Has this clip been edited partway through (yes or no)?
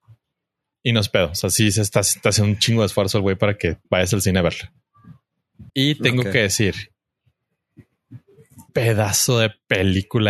yes